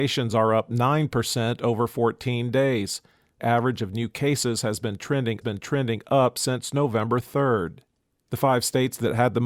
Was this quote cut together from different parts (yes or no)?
yes